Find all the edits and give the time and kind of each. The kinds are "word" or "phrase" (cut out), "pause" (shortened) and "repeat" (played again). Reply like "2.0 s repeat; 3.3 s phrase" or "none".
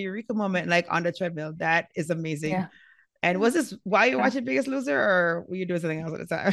none